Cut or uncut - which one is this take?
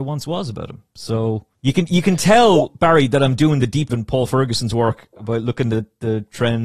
cut